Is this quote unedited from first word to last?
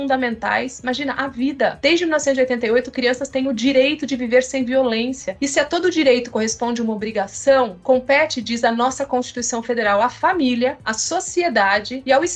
yes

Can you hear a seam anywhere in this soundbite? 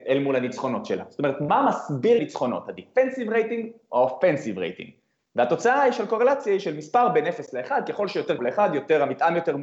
yes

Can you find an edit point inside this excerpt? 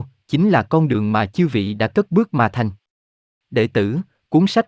no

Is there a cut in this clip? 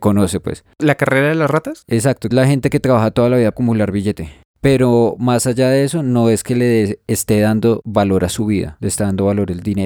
yes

